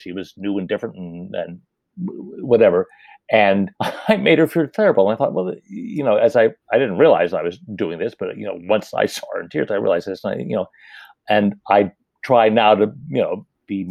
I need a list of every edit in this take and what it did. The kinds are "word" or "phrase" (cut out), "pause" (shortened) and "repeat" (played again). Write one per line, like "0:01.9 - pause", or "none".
0:03.7 - pause
0:06.6 - pause